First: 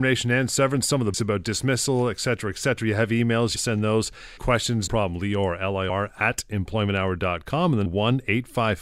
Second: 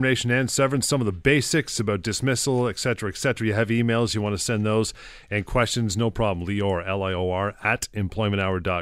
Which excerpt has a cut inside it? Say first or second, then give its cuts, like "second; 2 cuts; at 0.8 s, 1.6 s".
first; 6 cuts; at 1.1 s, 3.6 s, 4.4 s, 4.9 s, 5.9 s, 7.9 s